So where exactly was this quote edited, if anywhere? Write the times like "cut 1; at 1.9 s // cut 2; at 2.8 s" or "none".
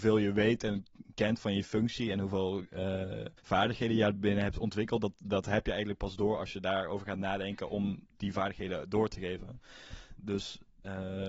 cut 1; at 3.4 s

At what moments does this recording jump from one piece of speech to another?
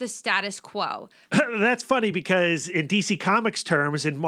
none

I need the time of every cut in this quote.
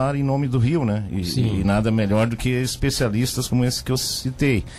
none

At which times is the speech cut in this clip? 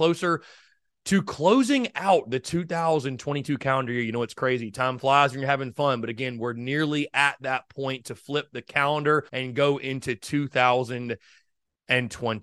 cut 1; at 9.3 s

